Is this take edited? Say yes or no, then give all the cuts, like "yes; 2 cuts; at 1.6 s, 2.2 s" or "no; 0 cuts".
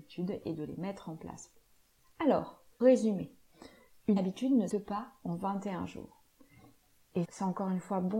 yes; 4 cuts; at 2.8 s, 4.2 s, 4.7 s, 7.2 s